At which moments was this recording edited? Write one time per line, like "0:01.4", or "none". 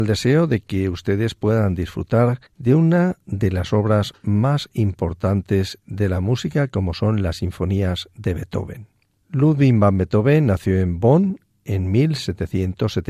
0:02.5